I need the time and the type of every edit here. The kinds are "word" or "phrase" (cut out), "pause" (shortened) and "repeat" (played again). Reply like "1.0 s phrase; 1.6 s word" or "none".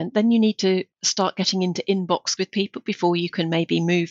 0.9 s pause; 2.4 s word

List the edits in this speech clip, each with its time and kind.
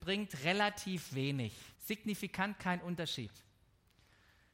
1.7 s pause

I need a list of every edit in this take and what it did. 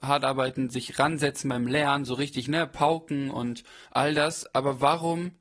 3.9 s pause

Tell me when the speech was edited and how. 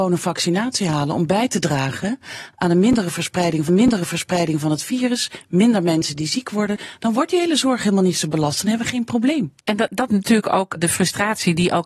3.7 s repeat; 9.6 s pause; 10.1 s word; 10.8 s word

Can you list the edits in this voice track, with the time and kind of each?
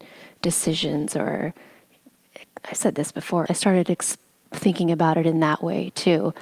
3.5 s phrase

